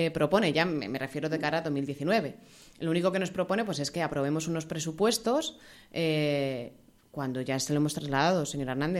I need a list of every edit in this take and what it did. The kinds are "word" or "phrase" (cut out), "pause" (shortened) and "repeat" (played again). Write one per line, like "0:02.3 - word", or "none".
none